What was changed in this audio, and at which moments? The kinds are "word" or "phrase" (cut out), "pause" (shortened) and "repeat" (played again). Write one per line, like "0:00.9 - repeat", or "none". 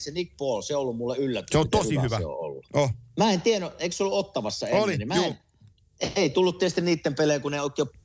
none